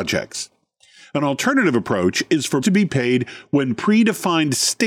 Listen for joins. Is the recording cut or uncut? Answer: cut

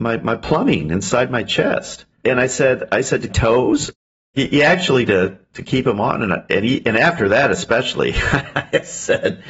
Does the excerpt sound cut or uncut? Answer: cut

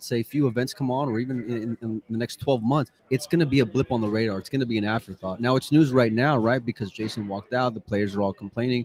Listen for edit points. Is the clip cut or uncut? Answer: cut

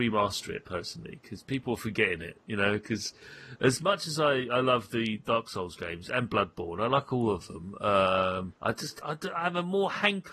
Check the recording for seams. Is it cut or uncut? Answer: cut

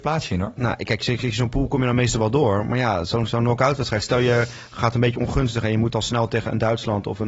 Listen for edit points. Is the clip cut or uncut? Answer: uncut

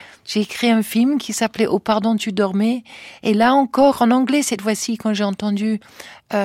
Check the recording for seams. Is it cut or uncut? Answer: uncut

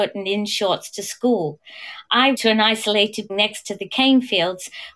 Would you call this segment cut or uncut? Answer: cut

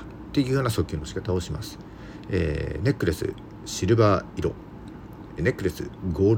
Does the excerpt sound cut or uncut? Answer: cut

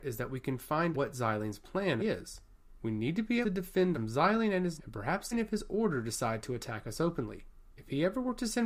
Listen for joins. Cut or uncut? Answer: cut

